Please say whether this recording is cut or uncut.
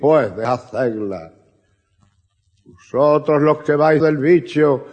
cut